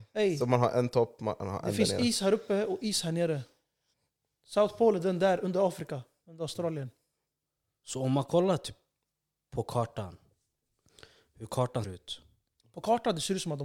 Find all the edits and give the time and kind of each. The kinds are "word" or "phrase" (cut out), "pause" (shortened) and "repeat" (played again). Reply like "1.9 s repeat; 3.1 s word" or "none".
11.8 s word

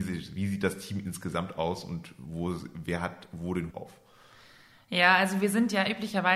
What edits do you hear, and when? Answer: 3.7 s word

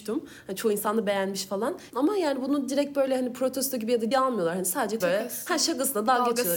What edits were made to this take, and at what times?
4.1 s word; 5.0 s word

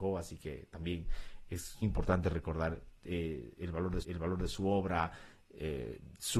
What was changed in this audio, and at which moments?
1.8 s word; 4.0 s repeat

